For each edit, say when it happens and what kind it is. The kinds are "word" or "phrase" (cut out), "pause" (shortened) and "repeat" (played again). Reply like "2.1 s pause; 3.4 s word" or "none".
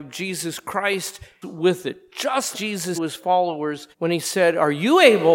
1.4 s phrase; 2.5 s word; 2.9 s phrase; 3.9 s pause